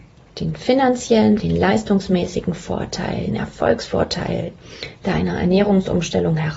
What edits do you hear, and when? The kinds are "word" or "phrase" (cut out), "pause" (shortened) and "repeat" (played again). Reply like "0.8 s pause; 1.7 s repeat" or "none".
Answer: 1.4 s word; 3.3 s word